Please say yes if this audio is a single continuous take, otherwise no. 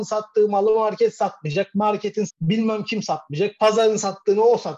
no